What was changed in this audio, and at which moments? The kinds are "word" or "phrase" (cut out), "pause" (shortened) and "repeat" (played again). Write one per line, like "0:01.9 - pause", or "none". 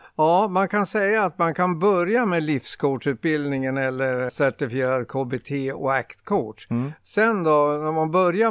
0:04.3 - word